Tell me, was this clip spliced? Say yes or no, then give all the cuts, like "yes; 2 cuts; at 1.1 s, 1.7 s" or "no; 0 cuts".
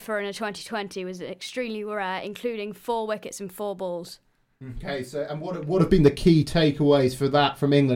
no; 0 cuts